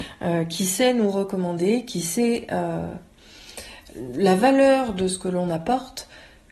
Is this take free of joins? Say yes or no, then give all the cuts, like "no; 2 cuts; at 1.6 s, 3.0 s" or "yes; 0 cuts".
yes; 0 cuts